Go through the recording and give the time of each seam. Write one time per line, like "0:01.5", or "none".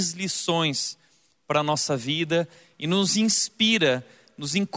none